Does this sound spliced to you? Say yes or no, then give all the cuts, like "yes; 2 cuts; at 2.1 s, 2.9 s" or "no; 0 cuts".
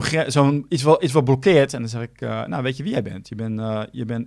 no; 0 cuts